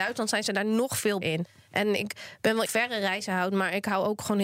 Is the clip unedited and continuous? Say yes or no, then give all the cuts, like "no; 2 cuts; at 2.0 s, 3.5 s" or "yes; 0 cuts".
no; 2 cuts; at 1.2 s, 2.7 s